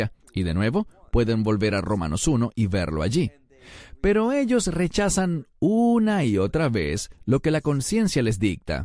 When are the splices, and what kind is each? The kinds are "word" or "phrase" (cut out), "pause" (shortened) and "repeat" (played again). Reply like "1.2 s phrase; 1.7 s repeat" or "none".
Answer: none